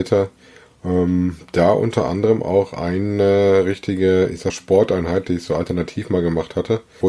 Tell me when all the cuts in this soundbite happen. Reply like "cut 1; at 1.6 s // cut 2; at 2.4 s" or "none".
cut 1; at 4.5 s